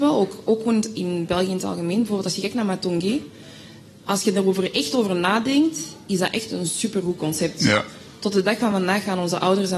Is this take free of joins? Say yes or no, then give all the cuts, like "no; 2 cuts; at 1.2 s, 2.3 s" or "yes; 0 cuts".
yes; 0 cuts